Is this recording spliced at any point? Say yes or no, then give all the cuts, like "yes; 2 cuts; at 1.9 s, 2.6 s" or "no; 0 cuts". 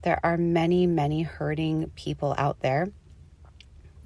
no; 0 cuts